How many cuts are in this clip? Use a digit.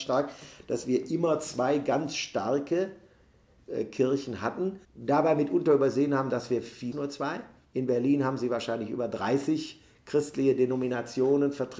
3